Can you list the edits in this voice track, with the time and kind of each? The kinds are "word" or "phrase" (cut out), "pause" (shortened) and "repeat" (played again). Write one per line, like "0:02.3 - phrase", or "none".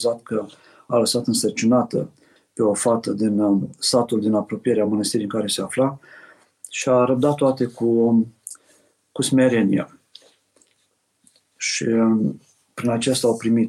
none